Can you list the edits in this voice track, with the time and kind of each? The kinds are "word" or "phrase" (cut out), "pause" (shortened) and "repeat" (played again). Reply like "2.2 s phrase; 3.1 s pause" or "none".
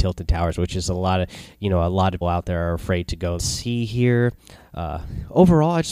2.2 s word; 3.4 s phrase